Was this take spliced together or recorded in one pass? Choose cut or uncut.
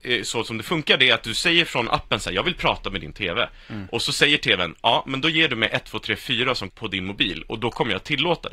cut